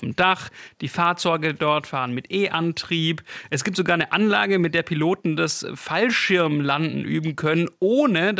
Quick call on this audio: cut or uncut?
uncut